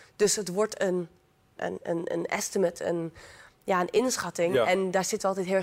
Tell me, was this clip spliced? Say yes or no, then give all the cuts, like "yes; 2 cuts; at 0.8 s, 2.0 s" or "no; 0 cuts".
yes; 1 cut; at 1.6 s